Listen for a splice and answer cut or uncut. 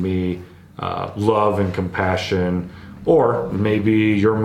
uncut